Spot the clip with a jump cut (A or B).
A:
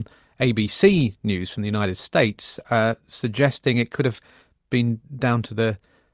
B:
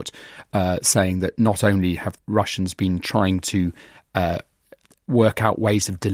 B